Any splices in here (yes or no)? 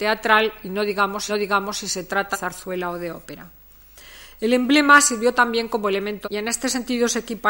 yes